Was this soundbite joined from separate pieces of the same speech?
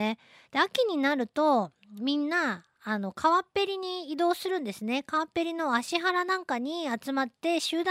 no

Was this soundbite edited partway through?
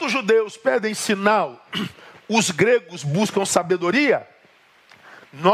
no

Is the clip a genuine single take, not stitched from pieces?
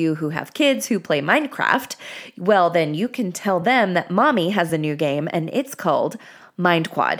yes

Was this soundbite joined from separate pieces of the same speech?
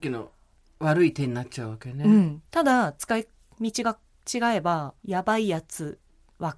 yes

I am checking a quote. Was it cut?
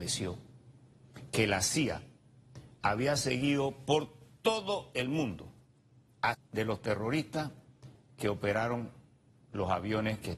yes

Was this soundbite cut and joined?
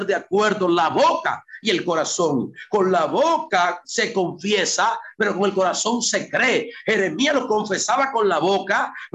no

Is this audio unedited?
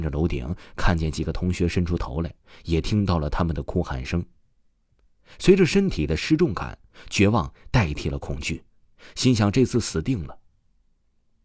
yes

